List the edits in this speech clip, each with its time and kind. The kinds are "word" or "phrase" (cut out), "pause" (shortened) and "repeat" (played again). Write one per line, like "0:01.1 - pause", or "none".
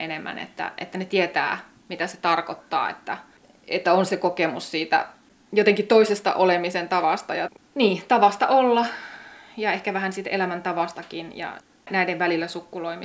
none

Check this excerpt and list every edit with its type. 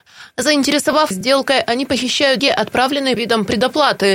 0:01.1 - word
0:02.4 - word
0:03.2 - word

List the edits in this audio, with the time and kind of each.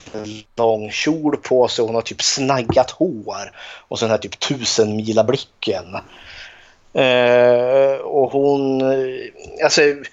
none

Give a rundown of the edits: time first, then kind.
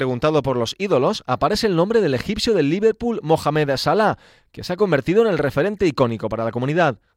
none

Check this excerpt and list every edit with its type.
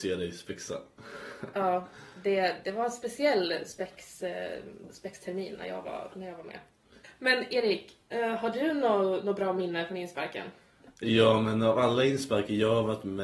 0:02.6 - word

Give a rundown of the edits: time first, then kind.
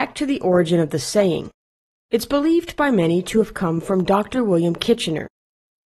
none

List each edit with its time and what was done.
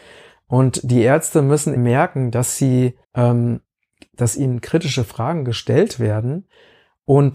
0:01.8 - word
0:03.0 - pause

